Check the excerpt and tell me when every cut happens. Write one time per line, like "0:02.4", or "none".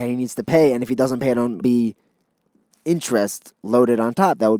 0:01.6